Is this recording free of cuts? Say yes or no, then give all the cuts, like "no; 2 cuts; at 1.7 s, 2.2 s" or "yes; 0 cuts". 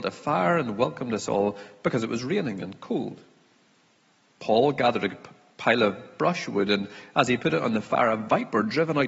yes; 0 cuts